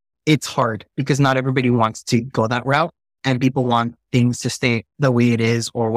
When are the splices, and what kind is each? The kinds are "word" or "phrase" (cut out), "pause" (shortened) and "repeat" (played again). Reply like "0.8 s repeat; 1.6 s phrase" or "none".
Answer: none